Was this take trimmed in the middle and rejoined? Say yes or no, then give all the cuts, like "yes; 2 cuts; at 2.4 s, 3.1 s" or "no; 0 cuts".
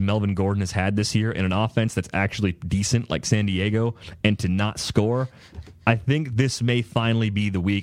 no; 0 cuts